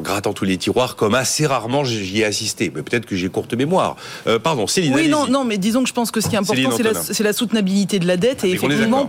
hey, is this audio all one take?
yes; 0 cuts

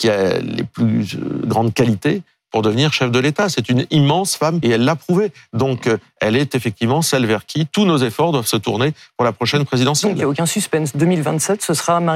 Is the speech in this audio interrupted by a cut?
yes; 1 cut; at 4.6 s

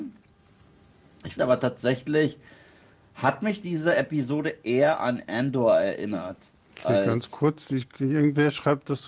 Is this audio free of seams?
no; 1 cut; at 1.4 s

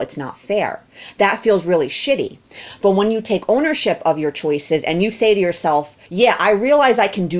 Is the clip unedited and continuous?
no; 1 cut; at 6.0 s

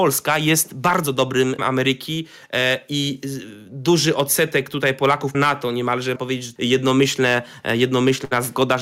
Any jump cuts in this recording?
yes; 4 cuts; at 1.6 s, 5.3 s, 6.2 s, 6.6 s

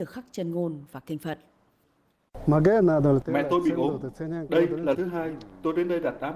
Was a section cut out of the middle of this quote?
yes; 1 cut; at 4.9 s

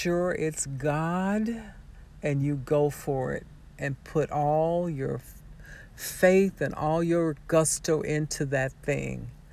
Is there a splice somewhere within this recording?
no; 0 cuts

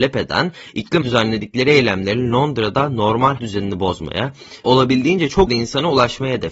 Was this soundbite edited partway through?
yes; 4 cuts; at 1.0 s, 3.4 s, 4.6 s, 5.5 s

